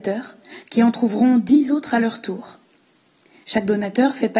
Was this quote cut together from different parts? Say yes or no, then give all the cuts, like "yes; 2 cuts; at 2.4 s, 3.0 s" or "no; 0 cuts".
no; 0 cuts